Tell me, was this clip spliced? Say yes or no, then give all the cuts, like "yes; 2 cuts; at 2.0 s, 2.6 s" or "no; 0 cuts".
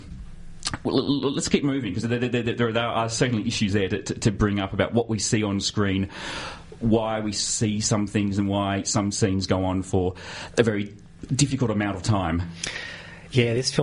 no; 0 cuts